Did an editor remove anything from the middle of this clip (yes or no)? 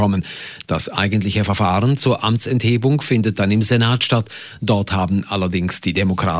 no